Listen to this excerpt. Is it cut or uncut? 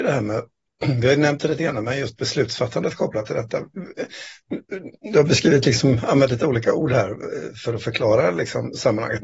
uncut